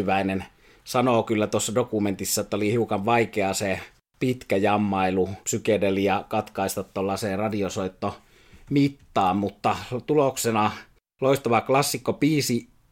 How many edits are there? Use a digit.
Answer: 1